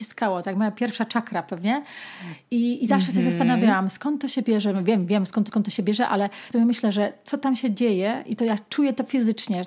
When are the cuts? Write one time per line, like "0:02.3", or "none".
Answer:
0:05.5
0:06.5

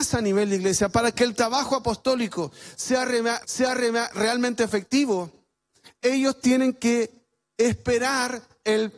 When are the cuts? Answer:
0:03.4

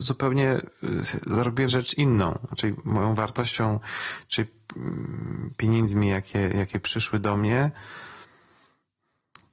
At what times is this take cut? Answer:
0:01.7

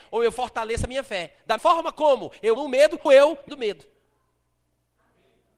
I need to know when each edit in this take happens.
0:01.6
0:02.6
0:03.1
0:03.5

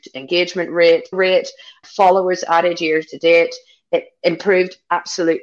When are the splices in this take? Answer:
0:01.1
0:01.8

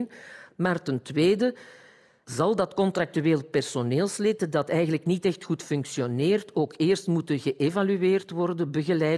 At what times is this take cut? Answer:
none

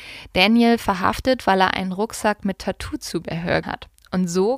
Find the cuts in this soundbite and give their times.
0:03.6

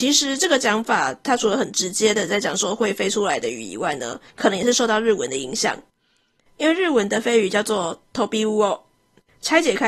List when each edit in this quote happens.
none

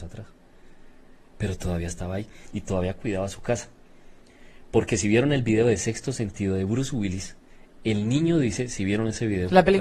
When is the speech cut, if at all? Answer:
none

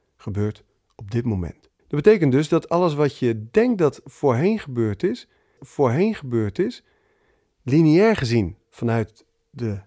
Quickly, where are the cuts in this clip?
0:01.8
0:05.6

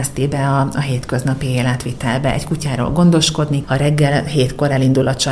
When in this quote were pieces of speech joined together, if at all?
0:03.6

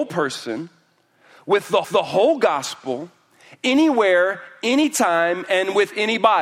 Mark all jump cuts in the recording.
0:01.8

